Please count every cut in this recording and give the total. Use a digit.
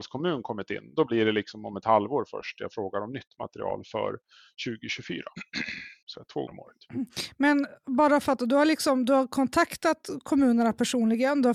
3